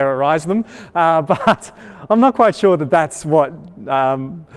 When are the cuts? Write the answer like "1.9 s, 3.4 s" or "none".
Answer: none